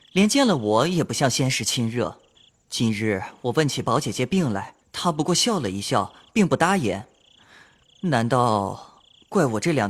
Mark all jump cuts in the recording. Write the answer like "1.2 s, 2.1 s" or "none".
2.4 s, 4.8 s